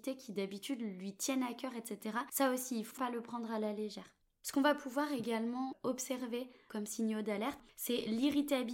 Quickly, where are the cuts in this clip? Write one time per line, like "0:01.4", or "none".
0:03.0
0:04.2

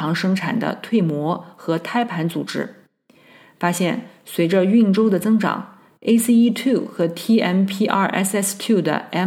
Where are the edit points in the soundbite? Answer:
none

